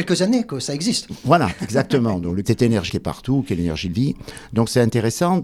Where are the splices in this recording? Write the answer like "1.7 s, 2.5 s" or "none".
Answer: 2.4 s, 2.9 s, 3.9 s